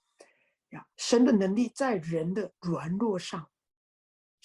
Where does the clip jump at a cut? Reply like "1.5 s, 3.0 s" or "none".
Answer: 0.9 s, 2.6 s